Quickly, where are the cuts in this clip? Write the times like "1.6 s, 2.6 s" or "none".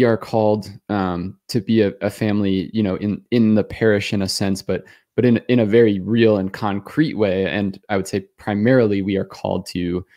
none